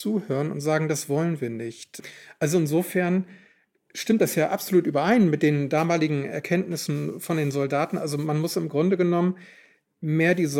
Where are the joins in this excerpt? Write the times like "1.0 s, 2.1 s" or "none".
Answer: none